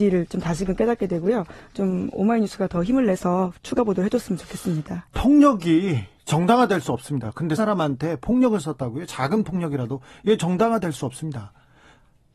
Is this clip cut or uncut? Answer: cut